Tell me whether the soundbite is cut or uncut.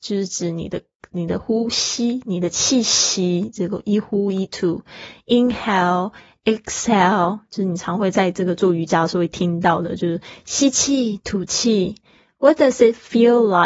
uncut